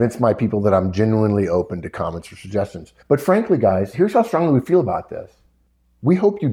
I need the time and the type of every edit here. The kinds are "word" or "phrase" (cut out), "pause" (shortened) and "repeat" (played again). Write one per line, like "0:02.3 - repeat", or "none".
0:03.0 - pause